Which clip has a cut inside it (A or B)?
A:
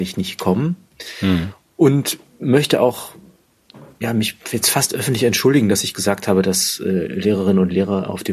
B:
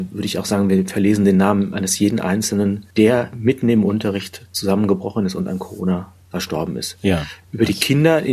B